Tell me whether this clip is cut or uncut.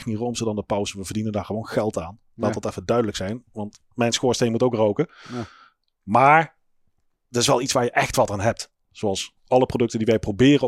uncut